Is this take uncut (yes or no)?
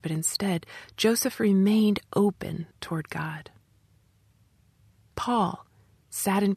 no